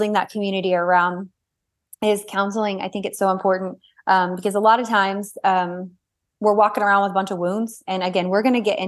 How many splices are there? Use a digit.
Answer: 0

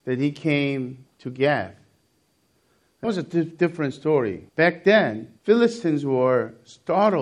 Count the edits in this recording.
4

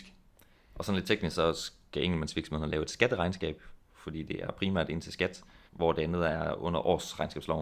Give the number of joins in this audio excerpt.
1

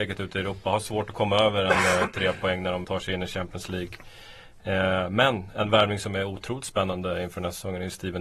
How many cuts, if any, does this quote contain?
1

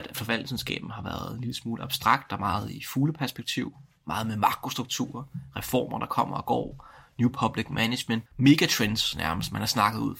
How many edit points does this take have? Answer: 1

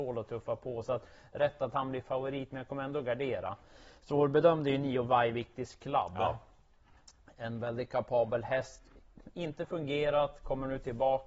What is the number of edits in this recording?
0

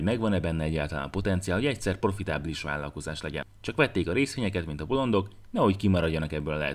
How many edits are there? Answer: 0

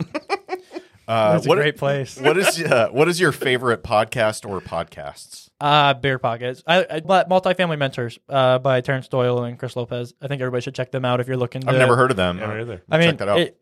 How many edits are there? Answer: 1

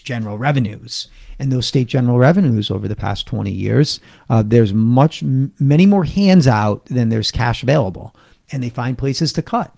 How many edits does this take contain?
0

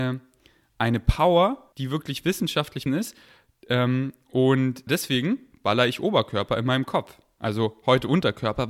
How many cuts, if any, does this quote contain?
3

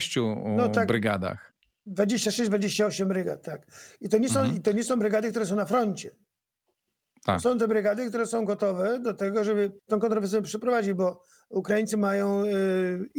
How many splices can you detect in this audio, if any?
1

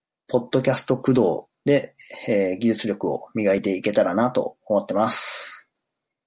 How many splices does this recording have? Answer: 1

